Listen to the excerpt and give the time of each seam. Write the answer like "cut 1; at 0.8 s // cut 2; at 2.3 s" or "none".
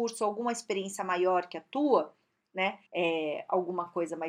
cut 1; at 2.9 s